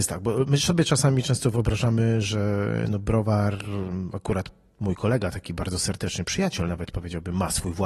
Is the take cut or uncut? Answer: uncut